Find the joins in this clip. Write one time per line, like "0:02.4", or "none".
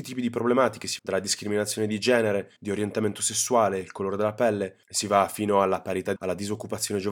0:01.0
0:02.6
0:04.8
0:06.2